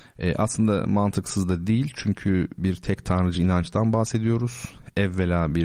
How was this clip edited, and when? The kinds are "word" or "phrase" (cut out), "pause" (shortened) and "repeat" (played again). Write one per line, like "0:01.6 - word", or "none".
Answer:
none